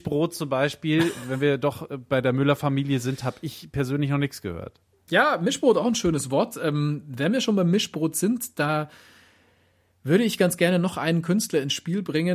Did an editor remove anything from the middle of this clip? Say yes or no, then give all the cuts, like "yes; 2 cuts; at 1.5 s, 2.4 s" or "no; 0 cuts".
no; 0 cuts